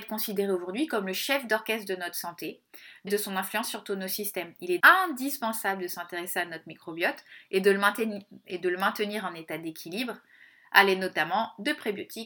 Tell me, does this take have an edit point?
yes; 2 cuts; at 3.1 s, 4.8 s

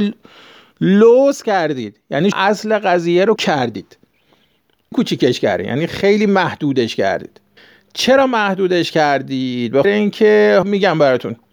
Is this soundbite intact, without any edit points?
no; 6 cuts; at 2.3 s, 3.4 s, 4.9 s, 7.6 s, 9.8 s, 10.6 s

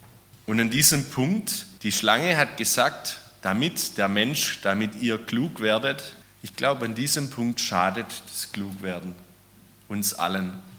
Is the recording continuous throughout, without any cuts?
no; 2 cuts; at 1.8 s, 6.2 s

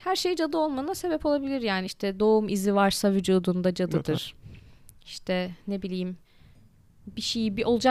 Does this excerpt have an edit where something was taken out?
no; 0 cuts

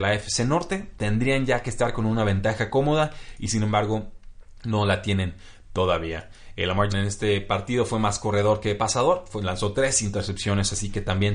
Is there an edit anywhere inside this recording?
yes; 1 cut; at 6.9 s

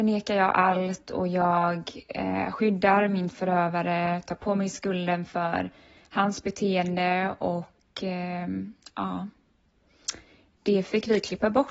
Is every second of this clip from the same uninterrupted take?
yes; 0 cuts

